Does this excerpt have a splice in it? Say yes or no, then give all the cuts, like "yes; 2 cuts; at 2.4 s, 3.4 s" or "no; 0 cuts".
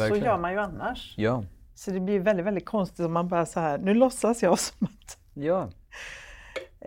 no; 0 cuts